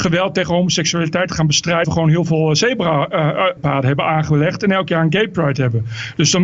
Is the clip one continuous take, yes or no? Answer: no